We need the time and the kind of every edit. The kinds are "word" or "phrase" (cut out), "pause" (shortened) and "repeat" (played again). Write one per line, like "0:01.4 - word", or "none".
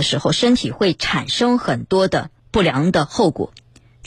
0:02.4 - pause